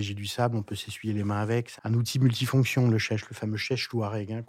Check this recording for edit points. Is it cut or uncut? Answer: cut